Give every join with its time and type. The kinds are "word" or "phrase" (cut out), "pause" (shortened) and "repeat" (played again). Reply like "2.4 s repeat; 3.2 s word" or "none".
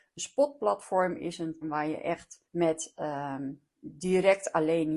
1.6 s word; 2.5 s pause; 3.8 s pause